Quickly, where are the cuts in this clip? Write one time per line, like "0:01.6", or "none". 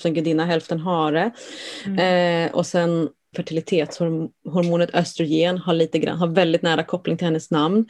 0:03.3